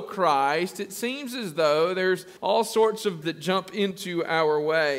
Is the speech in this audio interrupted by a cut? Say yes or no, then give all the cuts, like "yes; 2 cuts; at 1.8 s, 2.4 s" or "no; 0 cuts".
yes; 2 cuts; at 2.4 s, 3.2 s